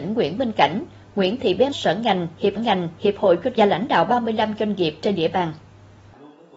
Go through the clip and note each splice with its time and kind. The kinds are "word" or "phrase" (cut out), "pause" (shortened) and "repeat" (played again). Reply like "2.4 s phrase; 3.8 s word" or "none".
1.7 s phrase; 2.6 s repeat; 3.6 s phrase

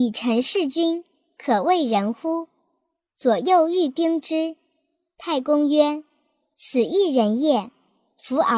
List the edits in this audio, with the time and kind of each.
none

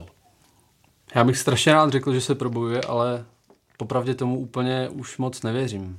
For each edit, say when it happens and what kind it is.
none

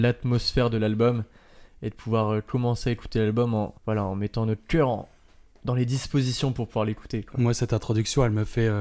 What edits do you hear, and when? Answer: 3.8 s pause

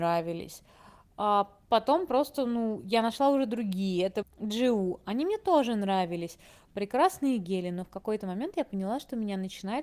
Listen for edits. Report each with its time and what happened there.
4.2 s word

